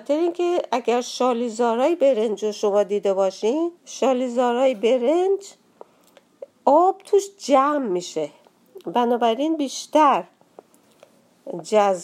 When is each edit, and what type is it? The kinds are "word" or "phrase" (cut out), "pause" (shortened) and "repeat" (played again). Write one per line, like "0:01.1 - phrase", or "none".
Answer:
0:03.8 - pause